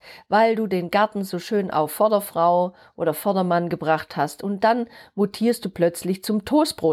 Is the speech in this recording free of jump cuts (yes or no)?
yes